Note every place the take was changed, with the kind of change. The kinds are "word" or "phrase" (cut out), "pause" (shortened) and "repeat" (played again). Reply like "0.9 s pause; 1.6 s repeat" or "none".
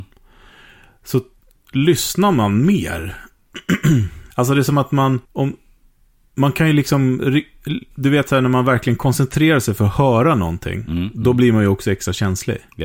4.3 s pause; 5.3 s pause; 7.9 s pause